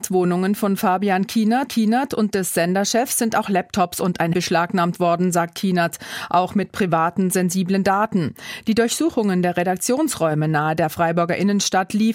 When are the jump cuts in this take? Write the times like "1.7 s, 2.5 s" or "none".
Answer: 1.7 s, 4.3 s